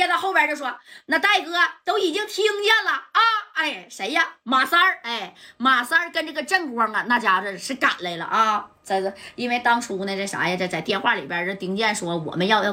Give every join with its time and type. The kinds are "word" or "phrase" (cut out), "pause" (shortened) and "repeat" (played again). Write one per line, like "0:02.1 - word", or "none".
none